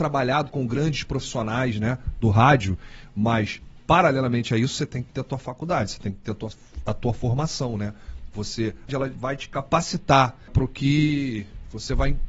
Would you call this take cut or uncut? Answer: cut